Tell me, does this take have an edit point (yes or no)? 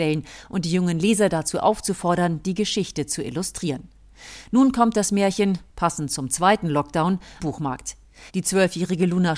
yes